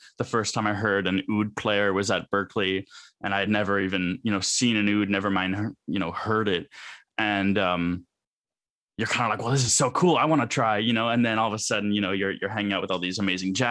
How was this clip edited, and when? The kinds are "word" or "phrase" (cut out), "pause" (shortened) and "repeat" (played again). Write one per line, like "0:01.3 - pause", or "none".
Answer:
none